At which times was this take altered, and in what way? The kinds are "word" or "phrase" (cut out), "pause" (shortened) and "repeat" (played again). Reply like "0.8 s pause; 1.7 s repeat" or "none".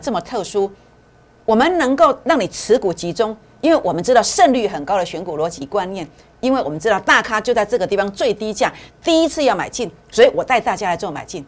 10.0 s pause